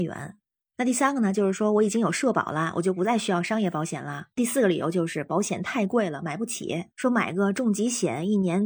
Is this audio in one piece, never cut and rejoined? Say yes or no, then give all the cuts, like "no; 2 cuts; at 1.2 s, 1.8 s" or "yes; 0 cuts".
no; 2 cuts; at 4.3 s, 6.9 s